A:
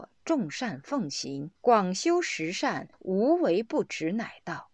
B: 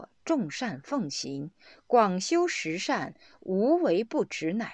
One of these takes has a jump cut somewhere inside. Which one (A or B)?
A